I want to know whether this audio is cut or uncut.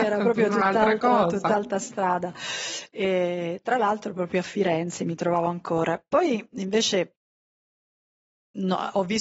uncut